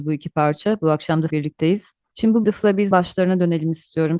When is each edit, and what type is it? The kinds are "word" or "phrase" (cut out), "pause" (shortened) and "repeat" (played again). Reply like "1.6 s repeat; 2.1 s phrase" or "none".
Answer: 1.3 s word; 2.4 s word; 2.9 s word